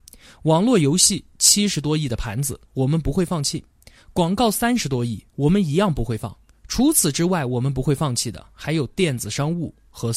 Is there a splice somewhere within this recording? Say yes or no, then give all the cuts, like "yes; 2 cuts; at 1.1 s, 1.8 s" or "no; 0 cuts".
no; 0 cuts